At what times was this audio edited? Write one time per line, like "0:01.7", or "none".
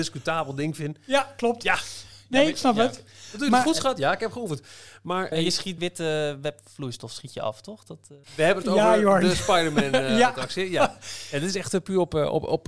0:05.3
0:05.8
0:08.2